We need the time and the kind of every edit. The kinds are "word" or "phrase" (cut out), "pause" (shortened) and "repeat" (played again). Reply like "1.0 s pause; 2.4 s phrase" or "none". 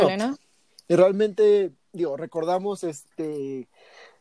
none